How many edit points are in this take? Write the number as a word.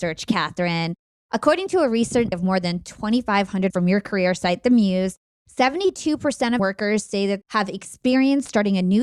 four